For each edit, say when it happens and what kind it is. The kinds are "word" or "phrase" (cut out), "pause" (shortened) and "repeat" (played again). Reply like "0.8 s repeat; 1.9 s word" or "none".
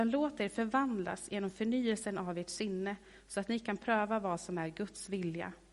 none